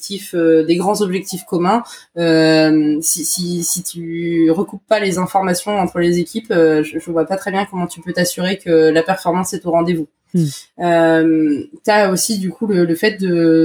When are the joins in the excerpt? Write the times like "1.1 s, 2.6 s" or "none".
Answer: none